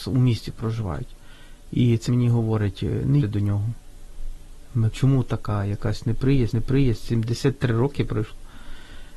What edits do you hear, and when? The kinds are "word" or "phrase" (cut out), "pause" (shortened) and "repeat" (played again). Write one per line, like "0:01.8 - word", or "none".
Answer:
0:02.1 - word
0:03.2 - word
0:04.9 - phrase
0:06.5 - repeat